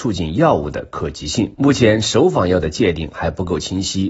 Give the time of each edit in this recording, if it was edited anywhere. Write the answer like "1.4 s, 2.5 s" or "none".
1.5 s